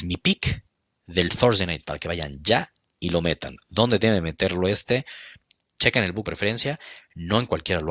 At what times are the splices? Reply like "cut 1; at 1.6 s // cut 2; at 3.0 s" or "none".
cut 1; at 1.8 s // cut 2; at 6.2 s

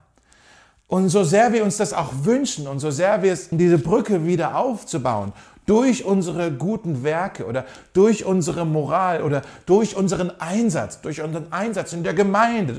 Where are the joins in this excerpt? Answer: cut 1; at 3.5 s

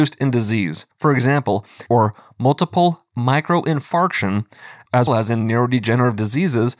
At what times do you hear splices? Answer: cut 1; at 0.9 s // cut 2; at 1.9 s // cut 3; at 5.1 s

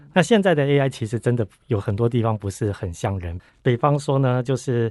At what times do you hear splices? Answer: cut 1; at 3.5 s

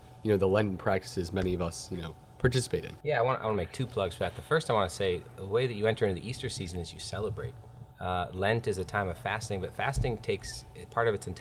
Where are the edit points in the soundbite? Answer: cut 1; at 3.0 s // cut 2; at 7.9 s

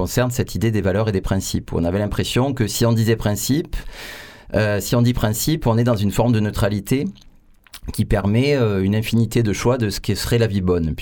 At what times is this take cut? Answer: none

